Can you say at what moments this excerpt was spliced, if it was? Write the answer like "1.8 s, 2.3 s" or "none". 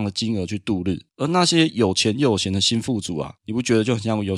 1.1 s, 3.4 s